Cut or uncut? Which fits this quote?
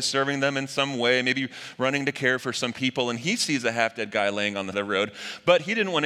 cut